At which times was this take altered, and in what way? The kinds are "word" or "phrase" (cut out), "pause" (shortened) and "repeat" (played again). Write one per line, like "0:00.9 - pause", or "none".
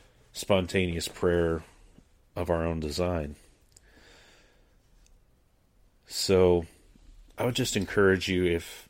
none